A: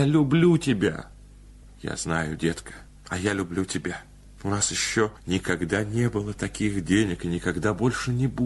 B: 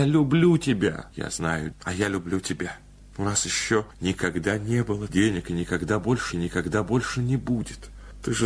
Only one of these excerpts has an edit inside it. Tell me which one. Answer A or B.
B